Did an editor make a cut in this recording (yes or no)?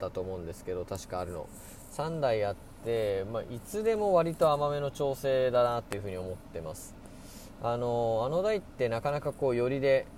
no